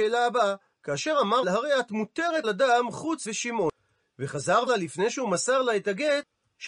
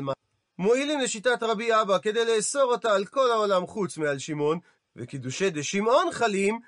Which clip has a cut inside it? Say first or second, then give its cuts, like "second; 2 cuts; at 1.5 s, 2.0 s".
first; 4 cuts; at 1.4 s, 2.4 s, 3.3 s, 4.7 s